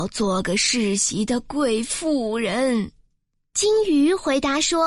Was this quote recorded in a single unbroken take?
yes; 0 cuts

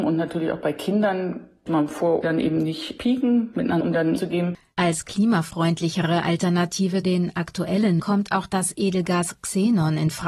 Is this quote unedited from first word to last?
no; 6 cuts; at 1.7 s, 2.2 s, 3.8 s, 4.2 s, 7.0 s, 8.0 s

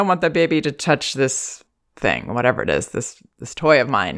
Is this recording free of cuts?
yes; 0 cuts

